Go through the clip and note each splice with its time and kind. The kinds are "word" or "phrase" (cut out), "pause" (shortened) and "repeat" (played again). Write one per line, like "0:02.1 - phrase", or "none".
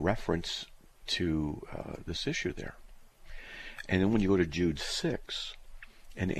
none